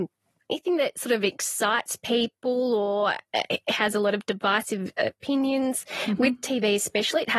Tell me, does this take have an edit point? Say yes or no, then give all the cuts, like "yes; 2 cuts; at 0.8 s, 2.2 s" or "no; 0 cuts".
no; 0 cuts